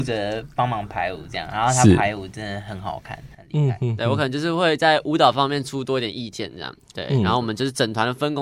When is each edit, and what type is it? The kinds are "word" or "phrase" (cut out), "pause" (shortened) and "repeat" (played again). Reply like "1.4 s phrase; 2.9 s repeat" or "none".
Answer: none